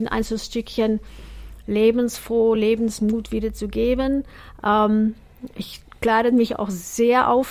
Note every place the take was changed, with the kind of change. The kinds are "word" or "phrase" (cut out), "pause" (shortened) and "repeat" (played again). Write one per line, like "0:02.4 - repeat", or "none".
none